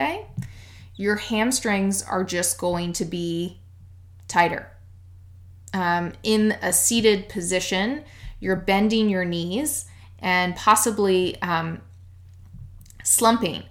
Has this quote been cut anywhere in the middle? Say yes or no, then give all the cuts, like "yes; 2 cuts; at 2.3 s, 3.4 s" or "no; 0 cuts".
no; 0 cuts